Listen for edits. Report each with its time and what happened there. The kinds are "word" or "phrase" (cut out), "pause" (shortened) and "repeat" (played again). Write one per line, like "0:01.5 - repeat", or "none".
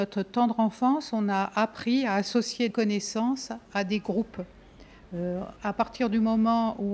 0:02.7 - word
0:05.6 - word